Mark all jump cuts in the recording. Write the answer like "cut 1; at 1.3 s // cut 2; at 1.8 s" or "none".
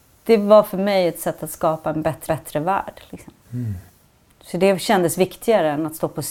cut 1; at 2.3 s // cut 2; at 3.4 s